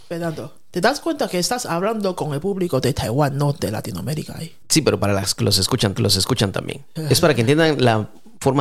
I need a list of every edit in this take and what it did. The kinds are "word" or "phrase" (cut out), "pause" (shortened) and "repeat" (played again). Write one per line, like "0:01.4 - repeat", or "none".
0:04.6 - pause
0:06.0 - repeat